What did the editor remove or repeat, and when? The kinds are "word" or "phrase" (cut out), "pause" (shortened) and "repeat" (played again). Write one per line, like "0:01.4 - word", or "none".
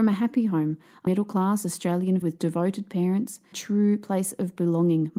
0:01.1 - word
0:02.2 - word
0:03.5 - word